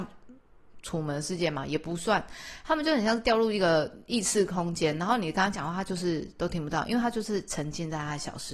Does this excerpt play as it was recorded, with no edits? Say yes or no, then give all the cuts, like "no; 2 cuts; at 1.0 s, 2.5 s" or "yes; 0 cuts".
yes; 0 cuts